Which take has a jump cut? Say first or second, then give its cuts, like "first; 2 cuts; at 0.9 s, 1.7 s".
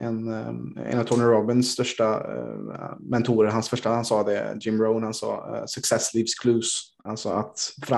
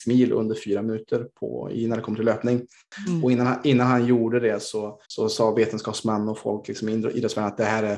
second; 1 cut; at 5.0 s